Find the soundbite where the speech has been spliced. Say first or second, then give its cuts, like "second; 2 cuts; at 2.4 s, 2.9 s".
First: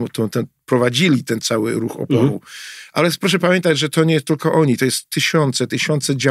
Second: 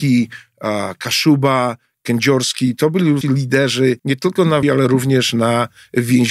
second; 3 cuts; at 3.2 s, 4.0 s, 4.6 s